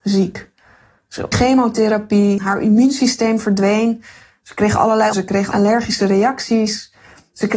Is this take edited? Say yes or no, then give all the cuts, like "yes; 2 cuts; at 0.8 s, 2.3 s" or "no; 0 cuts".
yes; 3 cuts; at 1.3 s, 2.4 s, 5.1 s